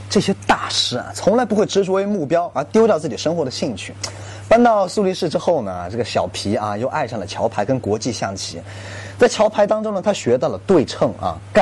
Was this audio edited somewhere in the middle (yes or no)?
no